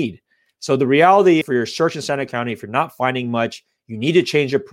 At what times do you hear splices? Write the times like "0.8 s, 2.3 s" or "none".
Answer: 1.4 s, 2.3 s